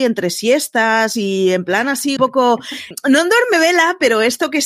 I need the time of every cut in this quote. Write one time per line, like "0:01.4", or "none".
0:02.2
0:02.9